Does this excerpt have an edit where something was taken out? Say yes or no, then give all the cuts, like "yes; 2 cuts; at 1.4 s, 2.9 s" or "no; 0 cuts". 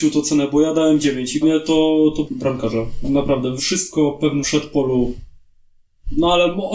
yes; 4 cuts; at 1.4 s, 2.3 s, 3.6 s, 4.4 s